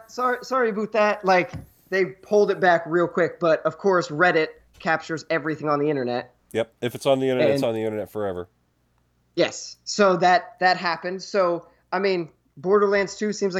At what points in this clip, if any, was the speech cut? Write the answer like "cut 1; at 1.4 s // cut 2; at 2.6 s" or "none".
none